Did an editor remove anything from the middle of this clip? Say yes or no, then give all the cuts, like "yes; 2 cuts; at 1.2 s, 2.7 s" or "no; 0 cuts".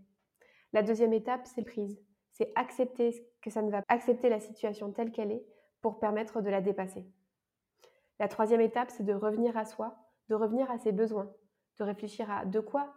yes; 2 cuts; at 1.6 s, 3.8 s